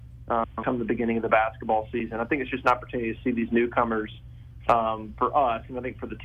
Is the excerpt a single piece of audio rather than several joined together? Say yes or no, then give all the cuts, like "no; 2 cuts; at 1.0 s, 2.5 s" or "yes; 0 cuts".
yes; 0 cuts